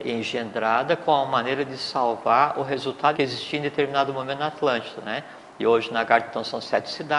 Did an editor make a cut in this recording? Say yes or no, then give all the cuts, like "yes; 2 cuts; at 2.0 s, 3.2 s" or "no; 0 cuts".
yes; 1 cut; at 3.1 s